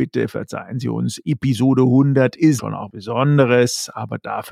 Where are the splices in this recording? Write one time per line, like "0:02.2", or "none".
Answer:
0:02.6
0:02.9